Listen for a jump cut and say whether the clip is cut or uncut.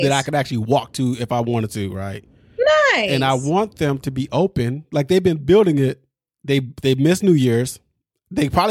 uncut